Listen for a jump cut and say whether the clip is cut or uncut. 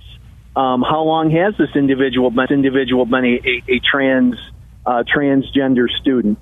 cut